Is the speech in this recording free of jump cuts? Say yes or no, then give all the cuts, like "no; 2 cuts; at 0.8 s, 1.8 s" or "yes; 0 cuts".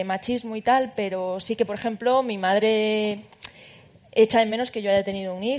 yes; 0 cuts